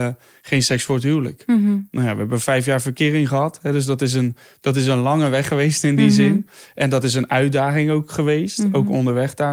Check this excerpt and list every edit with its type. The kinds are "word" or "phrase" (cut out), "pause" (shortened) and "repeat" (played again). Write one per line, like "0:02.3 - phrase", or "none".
none